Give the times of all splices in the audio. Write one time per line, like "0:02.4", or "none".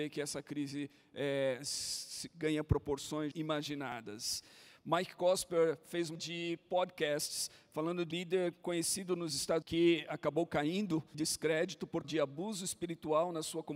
0:03.3
0:06.1
0:08.1
0:09.6
0:11.1
0:12.0

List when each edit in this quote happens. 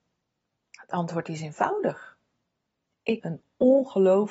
0:03.2

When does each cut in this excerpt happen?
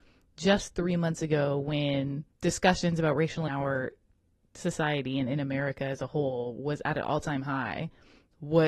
0:02.3
0:03.5

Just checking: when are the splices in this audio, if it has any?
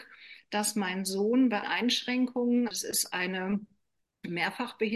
0:01.6
0:02.7

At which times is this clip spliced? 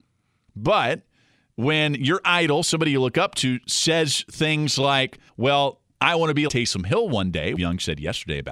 0:05.3
0:06.5
0:07.6

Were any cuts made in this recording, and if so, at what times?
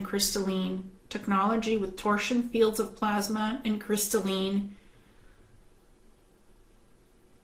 0:01.0

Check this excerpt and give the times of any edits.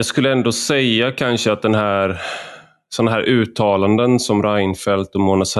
none

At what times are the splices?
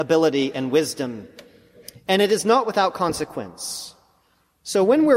none

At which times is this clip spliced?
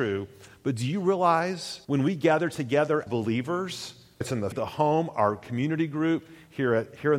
0:01.8
0:03.1
0:04.2
0:04.5

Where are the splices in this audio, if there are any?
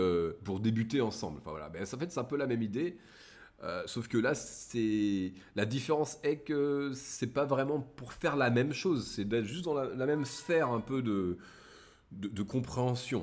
none

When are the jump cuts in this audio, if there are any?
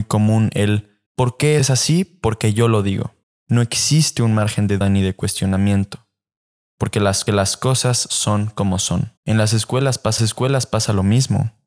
0:01.1
0:01.6
0:03.2
0:04.8
0:07.3
0:09.2
0:10.2

